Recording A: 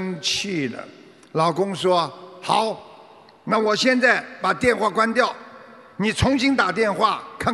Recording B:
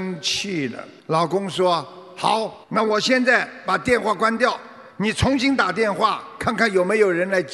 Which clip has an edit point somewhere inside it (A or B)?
B